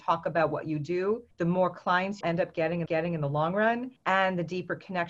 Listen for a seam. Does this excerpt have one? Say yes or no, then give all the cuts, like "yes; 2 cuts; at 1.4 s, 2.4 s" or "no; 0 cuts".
yes; 4 cuts; at 1.3 s, 2.2 s, 2.9 s, 4.0 s